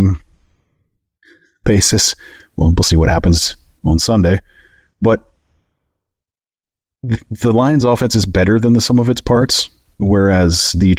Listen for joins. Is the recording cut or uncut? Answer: uncut